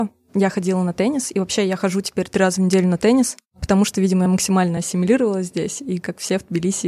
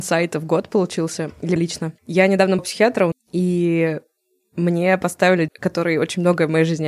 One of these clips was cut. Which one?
second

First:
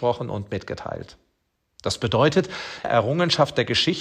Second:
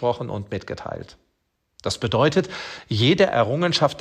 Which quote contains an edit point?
first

